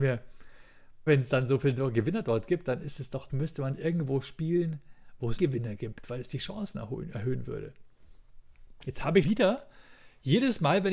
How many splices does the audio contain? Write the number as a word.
four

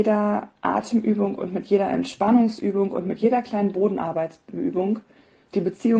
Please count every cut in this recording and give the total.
zero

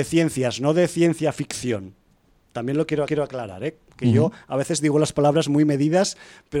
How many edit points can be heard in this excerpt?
one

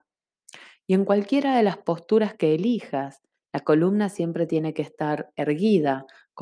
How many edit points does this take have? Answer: zero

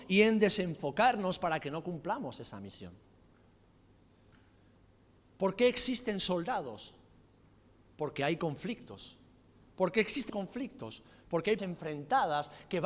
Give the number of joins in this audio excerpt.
two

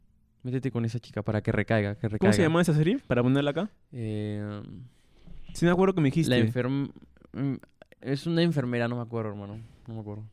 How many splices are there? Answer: zero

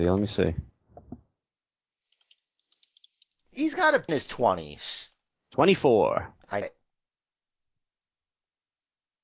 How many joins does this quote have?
two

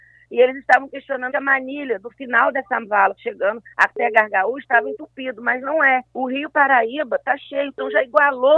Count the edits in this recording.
three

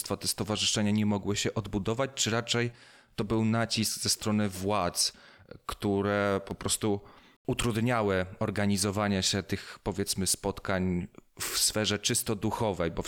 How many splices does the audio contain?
zero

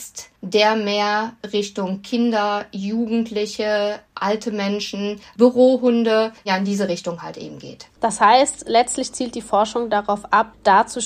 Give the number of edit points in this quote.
one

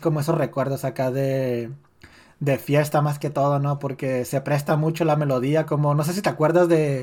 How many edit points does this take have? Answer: zero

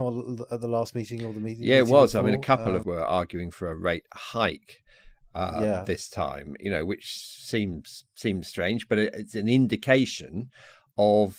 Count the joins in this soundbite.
one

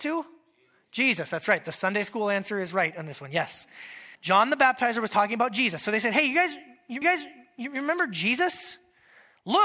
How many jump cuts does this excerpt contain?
two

